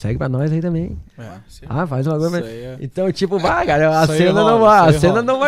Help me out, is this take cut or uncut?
uncut